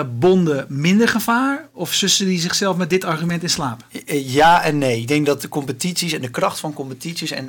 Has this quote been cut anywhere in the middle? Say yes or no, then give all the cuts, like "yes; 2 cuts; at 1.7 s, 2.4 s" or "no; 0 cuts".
no; 0 cuts